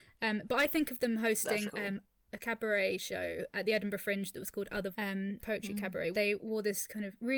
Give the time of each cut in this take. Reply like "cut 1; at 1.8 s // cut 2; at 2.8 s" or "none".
cut 1; at 1.7 s // cut 2; at 4.9 s // cut 3; at 5.4 s // cut 4; at 6.1 s